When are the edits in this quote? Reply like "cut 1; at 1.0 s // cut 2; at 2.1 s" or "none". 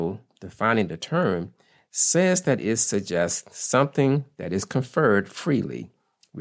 none